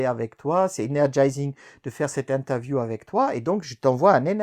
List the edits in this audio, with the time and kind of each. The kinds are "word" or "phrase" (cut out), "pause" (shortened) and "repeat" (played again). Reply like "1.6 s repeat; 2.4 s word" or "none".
none